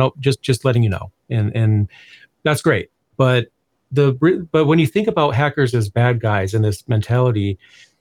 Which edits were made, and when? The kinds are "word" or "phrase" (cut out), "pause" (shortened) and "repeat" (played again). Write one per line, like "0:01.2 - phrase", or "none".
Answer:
none